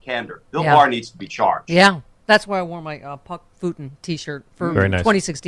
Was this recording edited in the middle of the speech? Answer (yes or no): yes